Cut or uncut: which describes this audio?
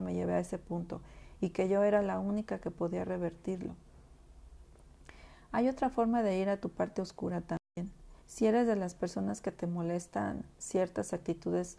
cut